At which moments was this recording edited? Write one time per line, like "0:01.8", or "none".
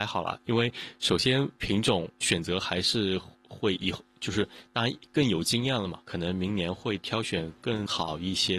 0:01.6
0:06.0